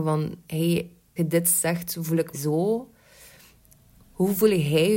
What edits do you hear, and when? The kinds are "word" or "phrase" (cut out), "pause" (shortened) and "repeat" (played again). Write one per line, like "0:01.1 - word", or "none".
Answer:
0:01.2 - word
0:02.3 - word